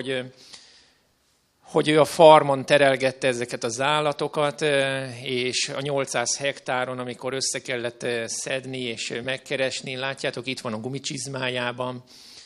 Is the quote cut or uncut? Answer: uncut